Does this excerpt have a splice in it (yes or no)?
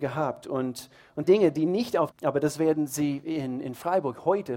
yes